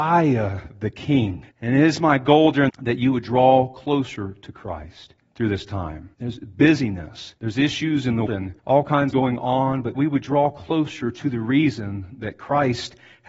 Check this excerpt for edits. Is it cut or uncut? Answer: cut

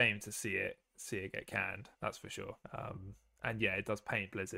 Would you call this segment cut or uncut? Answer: cut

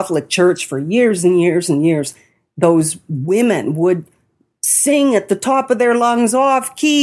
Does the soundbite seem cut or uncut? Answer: uncut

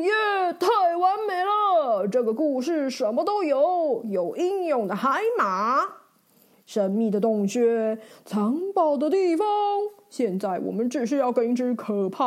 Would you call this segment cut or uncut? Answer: uncut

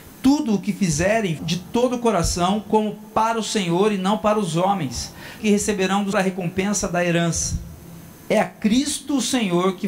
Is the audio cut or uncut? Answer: cut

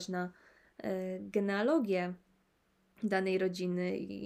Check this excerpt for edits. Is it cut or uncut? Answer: uncut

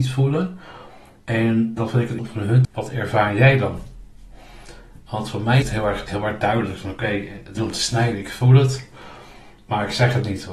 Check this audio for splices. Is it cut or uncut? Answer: cut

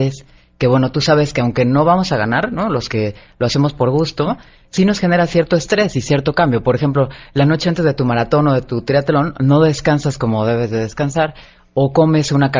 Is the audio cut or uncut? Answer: uncut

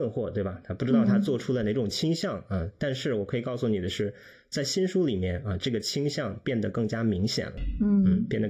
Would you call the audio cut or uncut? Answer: uncut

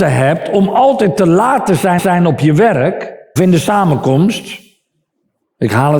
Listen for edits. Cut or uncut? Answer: cut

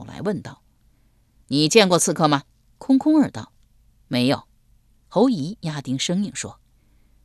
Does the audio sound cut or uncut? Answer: cut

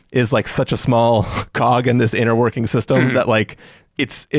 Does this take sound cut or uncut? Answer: uncut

